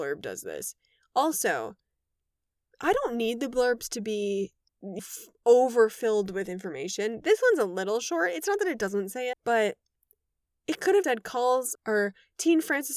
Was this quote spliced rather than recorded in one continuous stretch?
yes; 4 cuts; at 5.0 s, 9.3 s, 11.0 s, 11.7 s

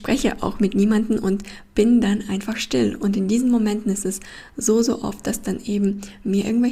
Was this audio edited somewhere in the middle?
no; 0 cuts

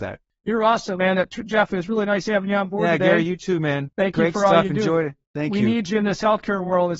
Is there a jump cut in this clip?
yes; 2 cuts; at 3.9 s, 5.2 s

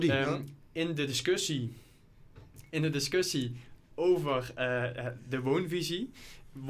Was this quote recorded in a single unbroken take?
yes; 0 cuts

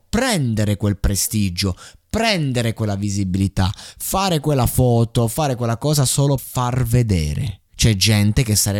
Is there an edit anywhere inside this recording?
yes; 2 cuts; at 6.4 s, 7.7 s

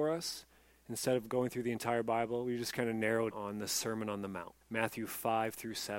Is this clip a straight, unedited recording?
no; 2 cuts; at 3.3 s, 4.6 s

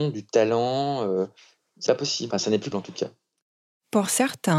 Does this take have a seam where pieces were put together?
yes; 3 cuts; at 1.9 s, 2.3 s, 2.7 s

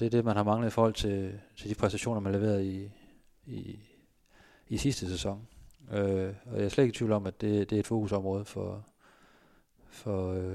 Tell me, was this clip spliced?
no; 0 cuts

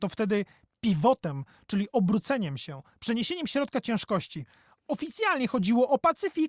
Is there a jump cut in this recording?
no; 0 cuts

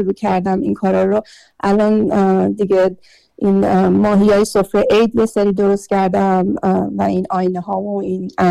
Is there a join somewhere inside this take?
no; 0 cuts

